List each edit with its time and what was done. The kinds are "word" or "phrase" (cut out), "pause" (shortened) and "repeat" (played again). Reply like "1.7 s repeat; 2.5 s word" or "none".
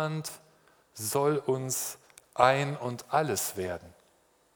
none